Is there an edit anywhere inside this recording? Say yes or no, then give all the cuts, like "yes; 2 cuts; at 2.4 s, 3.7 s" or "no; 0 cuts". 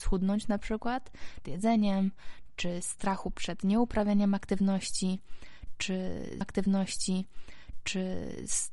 yes; 2 cuts; at 1.4 s, 6.4 s